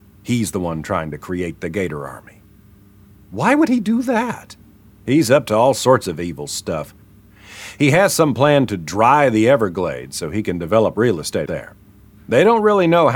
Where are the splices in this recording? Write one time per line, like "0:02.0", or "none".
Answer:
0:11.5